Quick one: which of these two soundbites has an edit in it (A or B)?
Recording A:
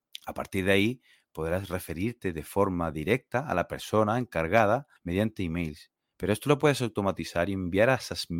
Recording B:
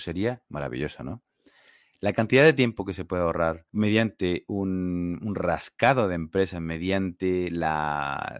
A